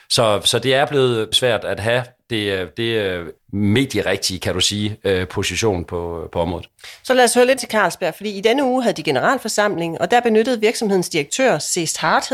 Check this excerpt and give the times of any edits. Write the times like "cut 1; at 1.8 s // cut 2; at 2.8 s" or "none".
cut 1; at 1.3 s // cut 2; at 3.4 s // cut 3; at 5.9 s // cut 4; at 7.6 s